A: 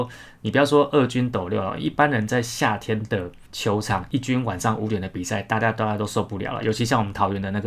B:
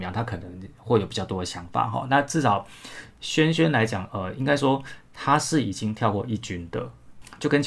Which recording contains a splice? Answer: A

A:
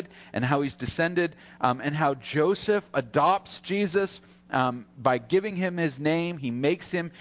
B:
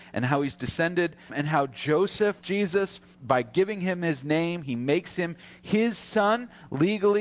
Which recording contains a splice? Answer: B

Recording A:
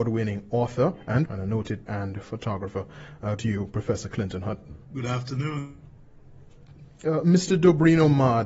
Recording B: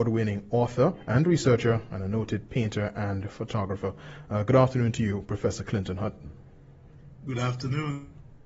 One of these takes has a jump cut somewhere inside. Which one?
A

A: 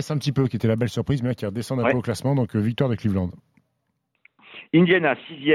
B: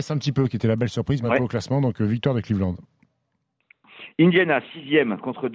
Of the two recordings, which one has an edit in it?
B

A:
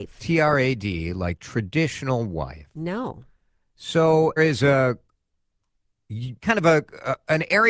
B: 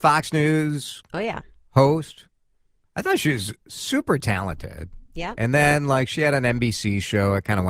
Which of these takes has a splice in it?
A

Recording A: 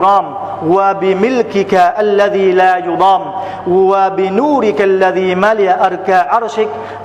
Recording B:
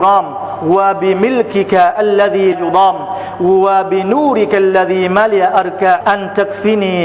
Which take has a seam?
B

